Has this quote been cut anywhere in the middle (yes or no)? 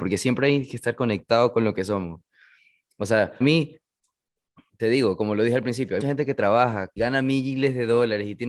yes